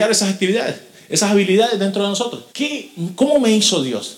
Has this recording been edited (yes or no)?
yes